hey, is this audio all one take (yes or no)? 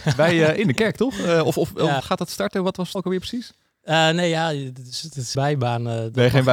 no